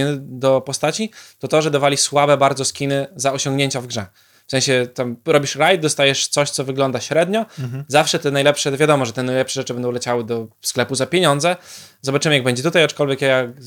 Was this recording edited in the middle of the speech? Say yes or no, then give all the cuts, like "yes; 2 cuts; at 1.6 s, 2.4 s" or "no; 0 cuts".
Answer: no; 0 cuts